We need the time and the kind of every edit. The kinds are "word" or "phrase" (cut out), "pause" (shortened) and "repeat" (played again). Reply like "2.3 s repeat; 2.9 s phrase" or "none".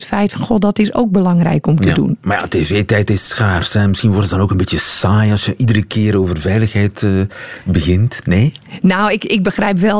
none